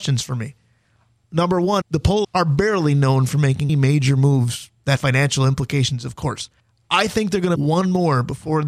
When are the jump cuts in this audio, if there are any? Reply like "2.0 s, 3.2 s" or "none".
1.8 s, 2.2 s, 3.7 s, 5.0 s, 6.6 s, 7.6 s